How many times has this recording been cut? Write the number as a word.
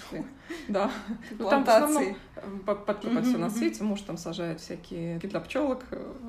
two